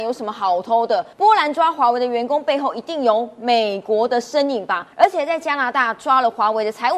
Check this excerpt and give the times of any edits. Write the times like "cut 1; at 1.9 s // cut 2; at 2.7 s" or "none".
cut 1; at 1.1 s // cut 2; at 4.9 s